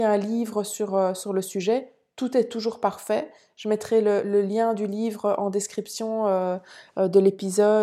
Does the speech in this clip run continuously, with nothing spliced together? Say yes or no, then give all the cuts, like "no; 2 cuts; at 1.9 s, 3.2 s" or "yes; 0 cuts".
yes; 0 cuts